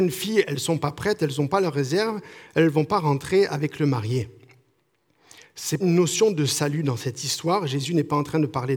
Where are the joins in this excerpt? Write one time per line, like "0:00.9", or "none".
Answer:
0:05.8